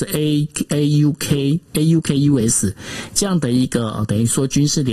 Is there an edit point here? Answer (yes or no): no